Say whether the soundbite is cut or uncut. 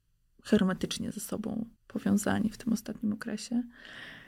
cut